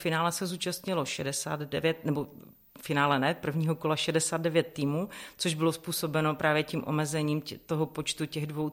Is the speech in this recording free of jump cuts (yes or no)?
yes